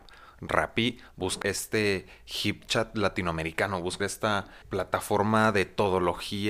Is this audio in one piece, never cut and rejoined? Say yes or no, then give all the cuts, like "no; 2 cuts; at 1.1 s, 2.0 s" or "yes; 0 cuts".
no; 3 cuts; at 1.4 s, 4.0 s, 4.6 s